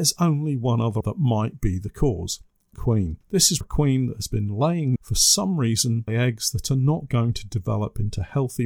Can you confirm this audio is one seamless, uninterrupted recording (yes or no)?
no